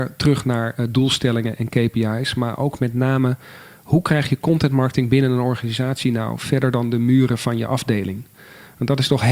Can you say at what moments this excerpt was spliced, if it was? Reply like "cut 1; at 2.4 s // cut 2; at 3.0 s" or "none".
none